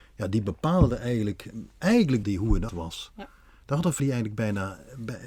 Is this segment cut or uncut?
cut